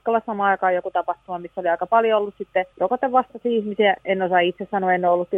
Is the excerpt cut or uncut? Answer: cut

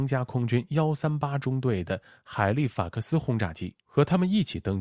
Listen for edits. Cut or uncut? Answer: cut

